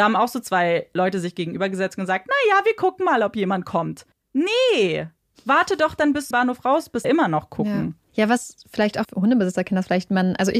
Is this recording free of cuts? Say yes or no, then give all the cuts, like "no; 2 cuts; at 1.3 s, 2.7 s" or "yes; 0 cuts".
no; 5 cuts; at 4.1 s, 6.3 s, 7.0 s, 8.1 s, 9.0 s